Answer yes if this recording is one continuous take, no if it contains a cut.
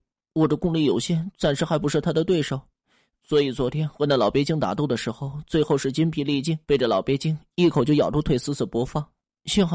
no